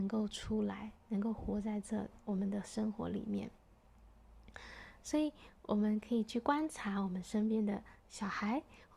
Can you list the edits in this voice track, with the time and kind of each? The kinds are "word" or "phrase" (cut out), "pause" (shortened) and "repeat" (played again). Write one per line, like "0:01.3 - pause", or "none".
0:08.0 - pause